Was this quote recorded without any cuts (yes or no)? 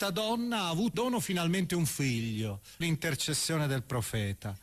no